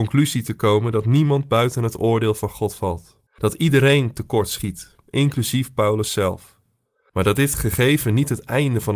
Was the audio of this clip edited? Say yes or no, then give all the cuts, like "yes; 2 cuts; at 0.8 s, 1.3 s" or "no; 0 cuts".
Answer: yes; 1 cut; at 3.3 s